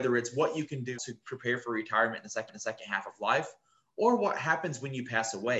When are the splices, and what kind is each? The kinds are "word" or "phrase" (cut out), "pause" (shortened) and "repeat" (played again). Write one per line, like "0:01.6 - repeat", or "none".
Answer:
0:01.0 - word
0:02.5 - repeat